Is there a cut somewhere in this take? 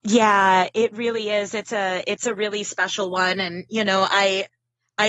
no; 0 cuts

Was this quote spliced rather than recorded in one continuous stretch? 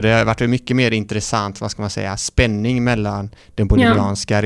no; 0 cuts

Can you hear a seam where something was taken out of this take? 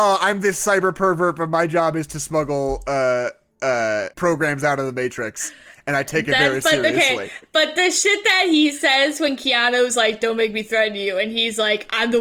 yes; 1 cut; at 4.1 s

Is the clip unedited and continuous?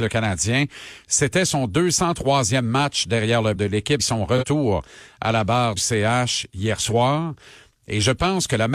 no; 3 cuts; at 3.6 s, 4.0 s, 5.8 s

